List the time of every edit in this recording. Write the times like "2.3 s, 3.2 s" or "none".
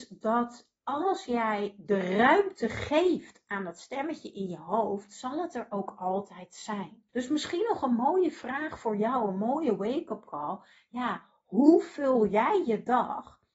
7.1 s